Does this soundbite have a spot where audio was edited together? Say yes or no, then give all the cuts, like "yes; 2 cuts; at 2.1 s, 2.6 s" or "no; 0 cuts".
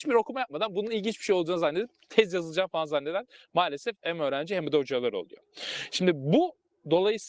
no; 0 cuts